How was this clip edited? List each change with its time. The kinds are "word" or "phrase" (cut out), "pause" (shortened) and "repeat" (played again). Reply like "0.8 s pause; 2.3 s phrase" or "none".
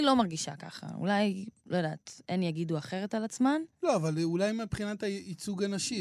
3.7 s pause